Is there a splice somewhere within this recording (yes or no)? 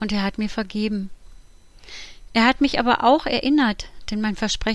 no